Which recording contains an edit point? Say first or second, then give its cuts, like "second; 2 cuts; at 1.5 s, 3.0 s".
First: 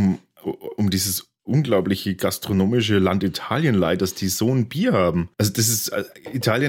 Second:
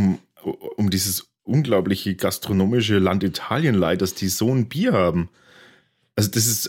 first; 1 cut; at 5.3 s